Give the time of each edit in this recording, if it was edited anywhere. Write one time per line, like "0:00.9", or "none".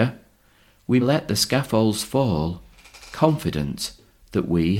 0:01.0